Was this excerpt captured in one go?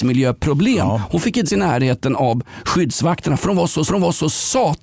no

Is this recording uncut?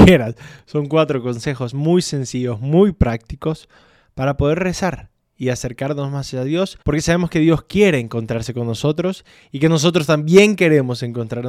no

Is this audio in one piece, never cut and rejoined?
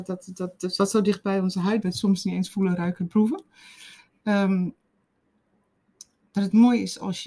no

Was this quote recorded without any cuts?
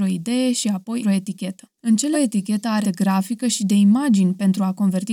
no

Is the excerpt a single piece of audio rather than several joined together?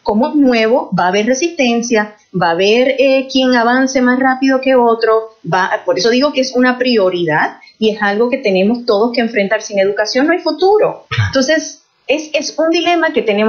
yes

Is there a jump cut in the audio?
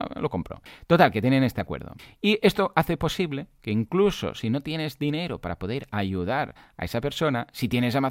no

